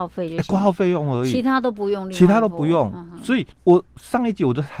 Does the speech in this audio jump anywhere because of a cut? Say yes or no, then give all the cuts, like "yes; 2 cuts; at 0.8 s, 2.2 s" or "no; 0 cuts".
yes; 1 cut; at 3.5 s